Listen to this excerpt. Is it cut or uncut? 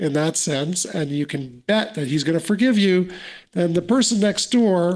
uncut